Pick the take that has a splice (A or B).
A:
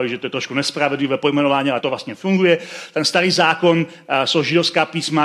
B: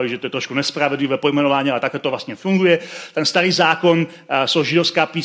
A